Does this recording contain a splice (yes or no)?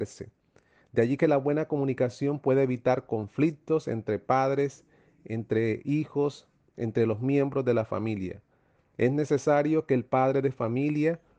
no